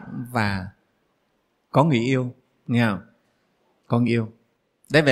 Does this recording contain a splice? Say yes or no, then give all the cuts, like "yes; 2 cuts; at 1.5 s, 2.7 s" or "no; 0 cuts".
no; 0 cuts